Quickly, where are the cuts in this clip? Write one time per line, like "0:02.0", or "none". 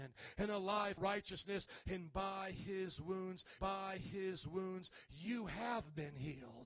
0:01.0
0:03.6

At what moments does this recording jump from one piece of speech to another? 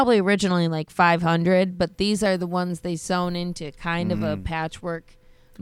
none

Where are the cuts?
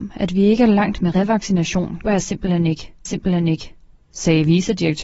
0:02.0
0:03.0

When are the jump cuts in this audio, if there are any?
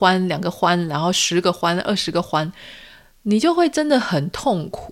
none

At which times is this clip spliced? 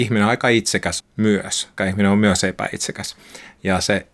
0:01.0
0:01.8

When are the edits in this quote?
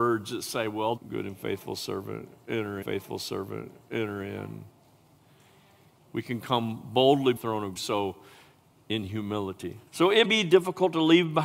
0:01.0
0:02.8
0:07.4
0:07.8
0:09.9
0:10.2

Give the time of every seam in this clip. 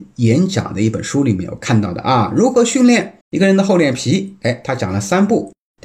0:03.2

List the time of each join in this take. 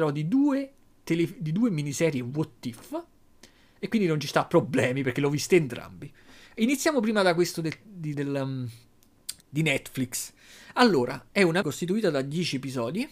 0:08.1
0:09.4
0:11.6

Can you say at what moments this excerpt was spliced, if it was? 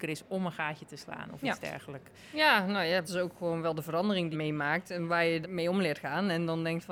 0:03.0
0:04.3
0:05.4

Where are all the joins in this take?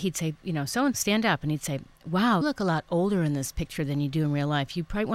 0:00.9
0:02.4

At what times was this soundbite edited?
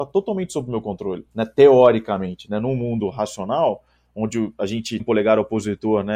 0:05.0

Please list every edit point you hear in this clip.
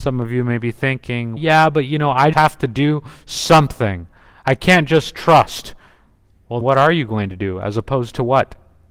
0:01.4
0:02.3
0:06.6

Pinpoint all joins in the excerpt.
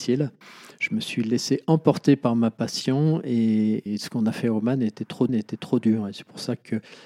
0:03.9
0:05.3

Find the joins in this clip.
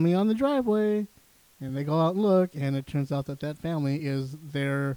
none

